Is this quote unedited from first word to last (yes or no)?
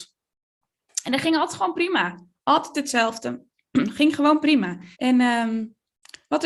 no